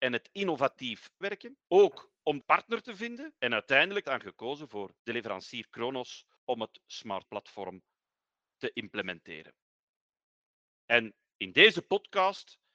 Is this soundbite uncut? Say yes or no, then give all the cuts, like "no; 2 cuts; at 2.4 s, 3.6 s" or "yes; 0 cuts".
no; 8 cuts; at 1.2 s, 1.6 s, 2.4 s, 3.4 s, 4.0 s, 5.0 s, 6.4 s, 7.2 s